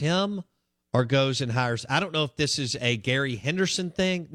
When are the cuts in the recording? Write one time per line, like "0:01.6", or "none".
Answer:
none